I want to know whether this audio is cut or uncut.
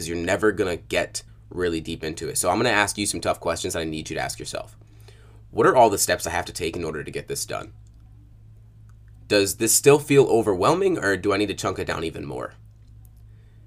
cut